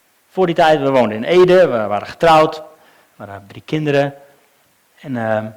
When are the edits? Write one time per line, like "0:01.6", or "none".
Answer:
none

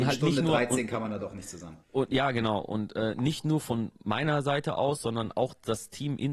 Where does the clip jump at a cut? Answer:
0:01.8

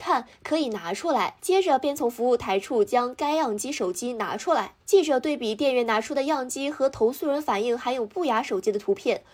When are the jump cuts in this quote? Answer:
0:01.4
0:04.8

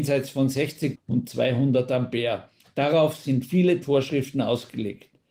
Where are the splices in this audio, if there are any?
0:00.9
0:02.6
0:03.8

